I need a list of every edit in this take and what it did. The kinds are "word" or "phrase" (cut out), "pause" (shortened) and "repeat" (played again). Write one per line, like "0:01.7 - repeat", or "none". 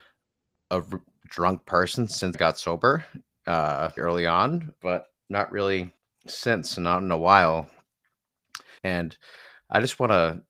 0:02.3 - word
0:04.0 - word
0:04.8 - word
0:05.2 - pause
0:06.0 - pause
0:08.8 - pause